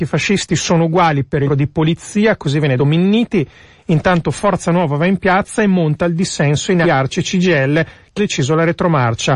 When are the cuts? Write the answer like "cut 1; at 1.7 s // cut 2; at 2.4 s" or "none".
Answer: cut 1; at 1.5 s // cut 2; at 2.8 s // cut 3; at 6.8 s // cut 4; at 8.2 s